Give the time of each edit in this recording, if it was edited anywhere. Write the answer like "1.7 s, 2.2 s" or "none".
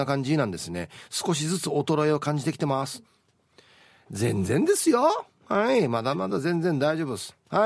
none